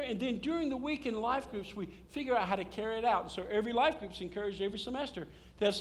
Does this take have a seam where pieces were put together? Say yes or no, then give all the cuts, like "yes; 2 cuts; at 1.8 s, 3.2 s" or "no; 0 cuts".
no; 0 cuts